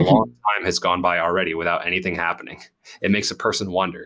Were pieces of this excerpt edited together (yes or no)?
no